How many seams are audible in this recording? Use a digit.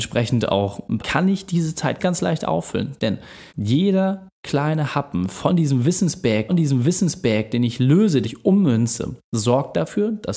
5